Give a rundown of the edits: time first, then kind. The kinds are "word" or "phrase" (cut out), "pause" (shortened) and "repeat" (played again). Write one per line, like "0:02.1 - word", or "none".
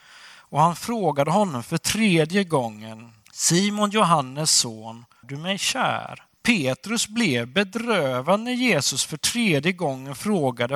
0:03.2 - pause
0:05.2 - word
0:06.3 - pause